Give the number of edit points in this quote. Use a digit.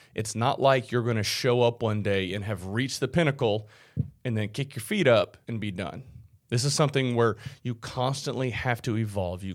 2